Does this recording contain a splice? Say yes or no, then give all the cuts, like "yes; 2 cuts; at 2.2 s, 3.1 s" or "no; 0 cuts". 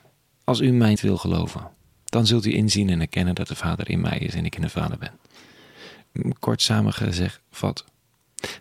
yes; 1 cut; at 1.0 s